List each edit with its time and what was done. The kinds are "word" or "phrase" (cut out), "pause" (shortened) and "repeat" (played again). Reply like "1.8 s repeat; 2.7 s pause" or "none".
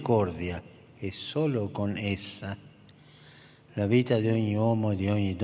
none